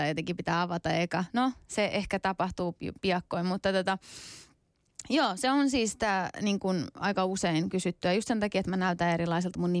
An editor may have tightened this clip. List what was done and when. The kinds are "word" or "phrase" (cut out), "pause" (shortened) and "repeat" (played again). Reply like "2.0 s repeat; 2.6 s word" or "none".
none